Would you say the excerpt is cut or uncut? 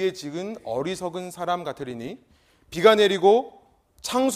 uncut